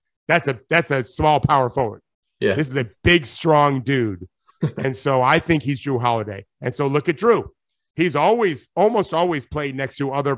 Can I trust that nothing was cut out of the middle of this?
yes; 0 cuts

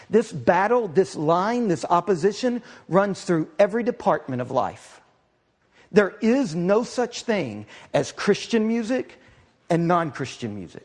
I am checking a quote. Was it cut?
no; 0 cuts

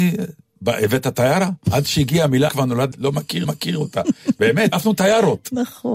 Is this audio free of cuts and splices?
no; 5 cuts; at 1.6 s, 2.5 s, 2.9 s, 3.4 s, 4.7 s

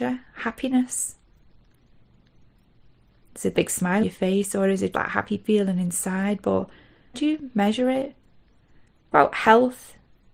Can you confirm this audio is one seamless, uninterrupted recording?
no; 5 cuts; at 3.5 s, 4.0 s, 4.9 s, 7.1 s, 9.1 s

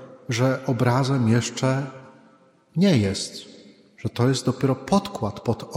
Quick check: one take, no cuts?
yes; 0 cuts

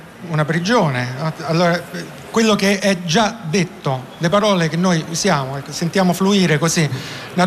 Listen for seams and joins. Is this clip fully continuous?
yes; 0 cuts

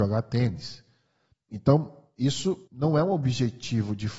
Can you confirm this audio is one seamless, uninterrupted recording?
no; 1 cut; at 2.7 s

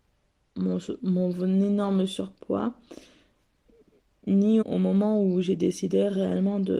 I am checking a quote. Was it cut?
yes; 1 cut; at 4.6 s

